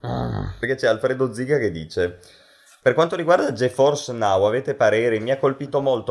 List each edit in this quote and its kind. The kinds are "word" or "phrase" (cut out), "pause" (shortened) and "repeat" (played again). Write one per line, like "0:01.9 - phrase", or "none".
none

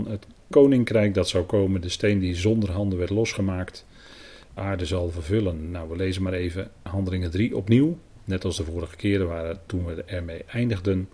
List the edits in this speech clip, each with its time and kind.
0:04.6 - phrase

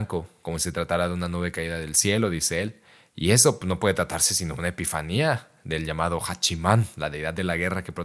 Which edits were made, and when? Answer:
none

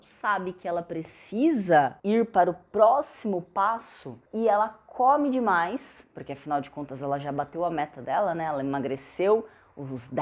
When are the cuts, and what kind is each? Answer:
0:02.0 - pause
0:04.3 - pause

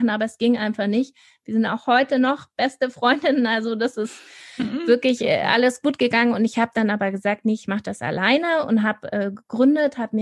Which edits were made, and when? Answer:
none

